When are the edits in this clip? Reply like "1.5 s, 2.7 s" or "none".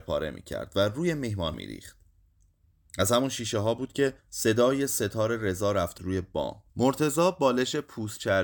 1.5 s, 4.2 s, 6.0 s, 6.7 s